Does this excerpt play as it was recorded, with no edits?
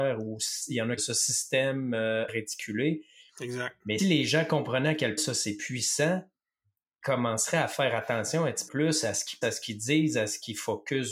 no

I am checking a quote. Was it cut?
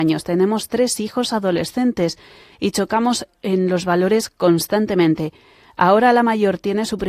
no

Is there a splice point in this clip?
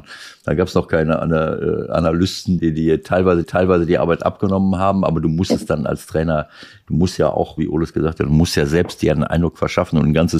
yes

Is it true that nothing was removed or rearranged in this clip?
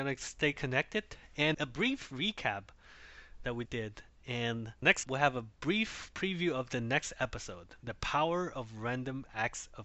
no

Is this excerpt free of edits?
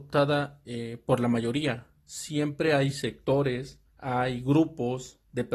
yes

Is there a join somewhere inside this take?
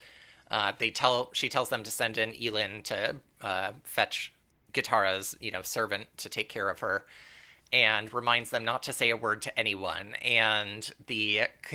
no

